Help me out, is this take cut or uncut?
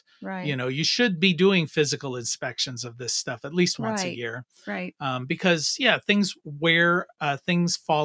uncut